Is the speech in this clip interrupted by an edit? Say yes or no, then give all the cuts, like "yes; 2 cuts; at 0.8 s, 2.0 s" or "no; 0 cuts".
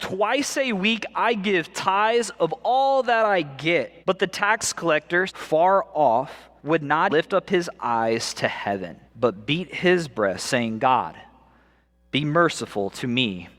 yes; 5 cuts; at 4.0 s, 5.3 s, 6.6 s, 7.1 s, 9.1 s